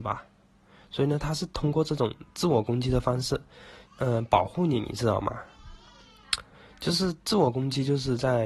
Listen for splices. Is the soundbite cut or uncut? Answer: cut